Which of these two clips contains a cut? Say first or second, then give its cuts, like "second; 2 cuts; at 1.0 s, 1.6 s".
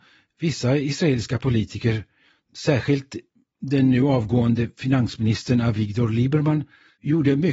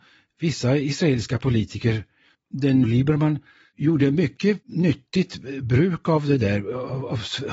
second; 2 cuts; at 2.3 s, 2.8 s